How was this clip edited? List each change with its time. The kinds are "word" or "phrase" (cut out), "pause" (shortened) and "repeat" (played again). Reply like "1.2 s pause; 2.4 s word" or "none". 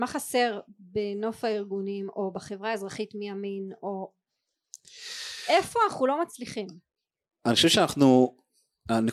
none